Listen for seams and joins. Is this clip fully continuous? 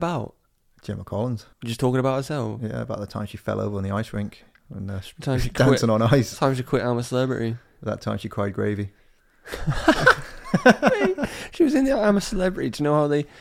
no; 1 cut; at 1.5 s

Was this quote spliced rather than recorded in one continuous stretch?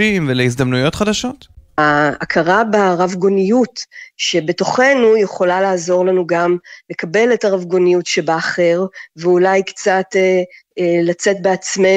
no; 0 cuts

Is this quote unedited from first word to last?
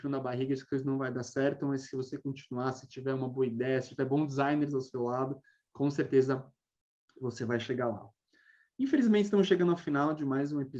yes; 0 cuts

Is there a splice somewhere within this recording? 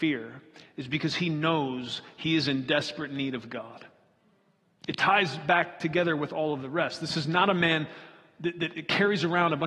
no; 0 cuts

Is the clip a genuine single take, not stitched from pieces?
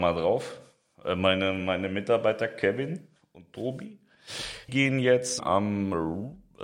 no; 3 cuts; at 3.2 s, 4.7 s, 5.4 s

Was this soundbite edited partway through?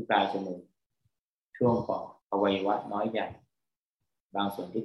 yes; 1 cut; at 2.2 s

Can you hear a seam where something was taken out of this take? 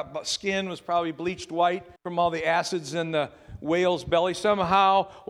yes; 1 cut; at 2.0 s

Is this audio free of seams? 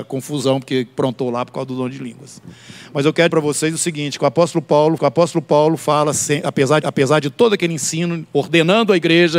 no; 3 cuts; at 3.3 s, 5.0 s, 6.8 s

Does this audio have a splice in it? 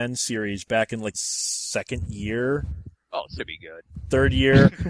yes; 2 cuts; at 1.1 s, 3.4 s

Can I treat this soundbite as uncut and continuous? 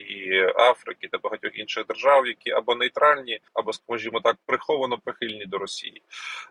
no; 1 cut; at 3.5 s

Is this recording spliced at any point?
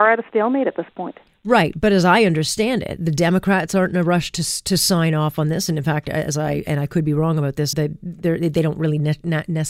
yes; 1 cut; at 7.7 s

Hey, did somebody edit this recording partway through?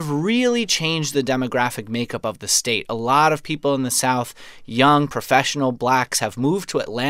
no; 0 cuts

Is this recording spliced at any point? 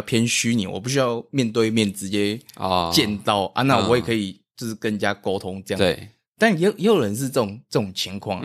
no; 0 cuts

